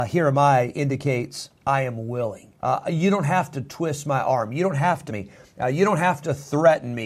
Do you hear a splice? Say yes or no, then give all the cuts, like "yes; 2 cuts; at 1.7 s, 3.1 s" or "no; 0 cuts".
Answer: yes; 3 cuts; at 1.6 s, 2.6 s, 5.1 s